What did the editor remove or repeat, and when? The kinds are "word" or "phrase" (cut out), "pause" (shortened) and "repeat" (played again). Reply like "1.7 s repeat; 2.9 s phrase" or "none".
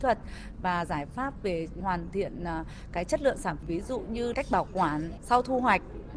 3.6 s word; 4.3 s word